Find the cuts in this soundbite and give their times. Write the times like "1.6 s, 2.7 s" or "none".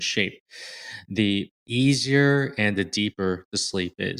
1.6 s